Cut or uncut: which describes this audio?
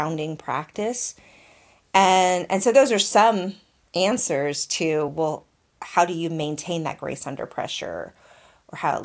uncut